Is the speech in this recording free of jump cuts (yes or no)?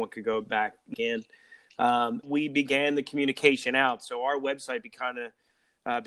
no